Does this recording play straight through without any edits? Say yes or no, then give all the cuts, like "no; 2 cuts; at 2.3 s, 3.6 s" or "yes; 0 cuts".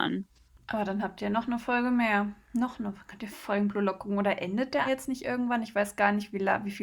no; 2 cuts; at 3.3 s, 4.8 s